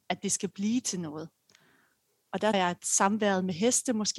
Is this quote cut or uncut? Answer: cut